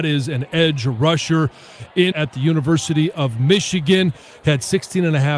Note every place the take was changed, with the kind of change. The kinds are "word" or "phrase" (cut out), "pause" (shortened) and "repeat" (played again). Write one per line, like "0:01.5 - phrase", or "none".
0:02.1 - phrase